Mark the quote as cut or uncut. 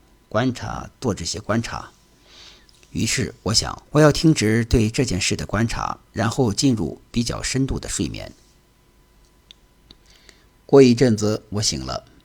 cut